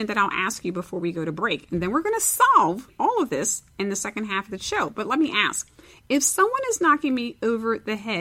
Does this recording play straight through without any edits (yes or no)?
yes